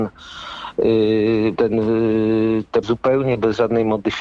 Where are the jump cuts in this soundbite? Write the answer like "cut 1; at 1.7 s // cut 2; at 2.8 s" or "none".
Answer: cut 1; at 1.5 s // cut 2; at 2.8 s